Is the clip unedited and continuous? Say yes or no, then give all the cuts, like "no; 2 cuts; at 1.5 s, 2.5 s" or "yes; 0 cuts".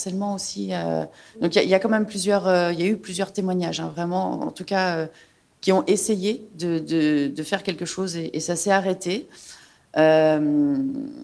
yes; 0 cuts